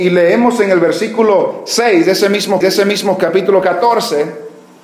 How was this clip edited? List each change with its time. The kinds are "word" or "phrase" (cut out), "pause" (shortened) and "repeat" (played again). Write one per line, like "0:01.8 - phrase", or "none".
0:02.6 - repeat